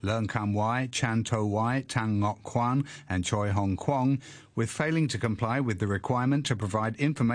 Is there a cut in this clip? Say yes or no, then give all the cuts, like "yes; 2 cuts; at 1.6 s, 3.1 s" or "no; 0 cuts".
no; 0 cuts